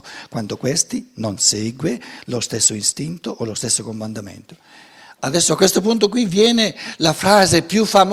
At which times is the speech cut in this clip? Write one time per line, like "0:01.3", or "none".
none

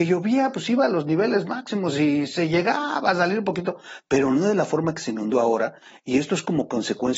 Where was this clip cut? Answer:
none

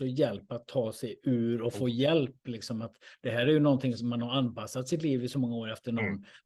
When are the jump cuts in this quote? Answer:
none

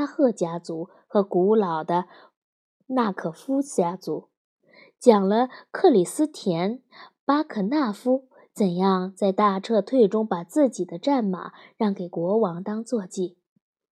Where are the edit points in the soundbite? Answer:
none

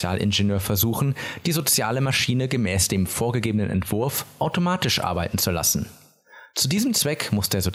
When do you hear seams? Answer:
none

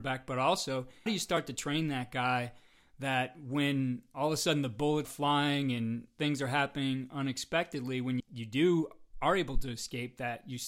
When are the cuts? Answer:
0:01.1
0:05.0
0:08.2

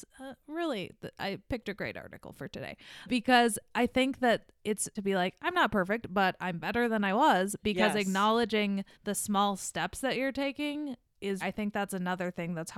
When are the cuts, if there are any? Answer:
0:03.1
0:05.0
0:08.9
0:11.4

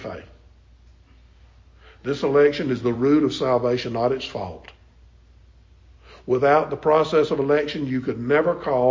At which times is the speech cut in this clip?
none

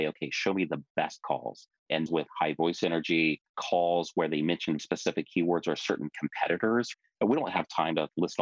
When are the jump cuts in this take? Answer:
0:02.1
0:03.5
0:04.8

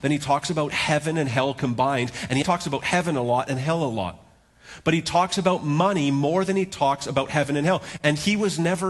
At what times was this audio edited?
0:02.4

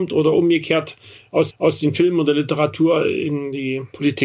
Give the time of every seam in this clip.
0:01.5

